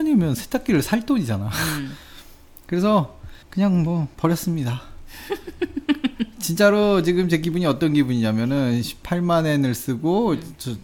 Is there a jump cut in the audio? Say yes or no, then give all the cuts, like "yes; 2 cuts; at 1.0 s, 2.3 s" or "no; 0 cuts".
yes; 1 cut; at 3.4 s